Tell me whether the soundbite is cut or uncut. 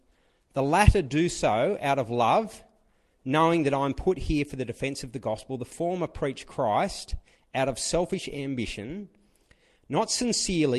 uncut